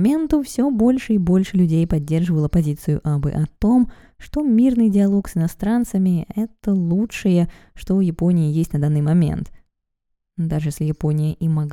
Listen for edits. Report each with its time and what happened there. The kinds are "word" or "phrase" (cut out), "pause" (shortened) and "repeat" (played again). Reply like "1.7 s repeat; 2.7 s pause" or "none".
none